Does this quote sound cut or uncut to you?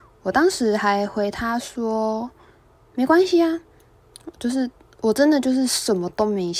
uncut